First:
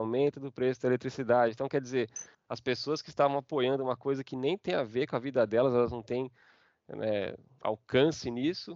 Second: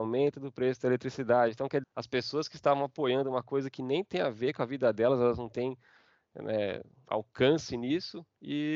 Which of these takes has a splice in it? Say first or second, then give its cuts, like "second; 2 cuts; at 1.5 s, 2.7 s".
second; 1 cut; at 1.8 s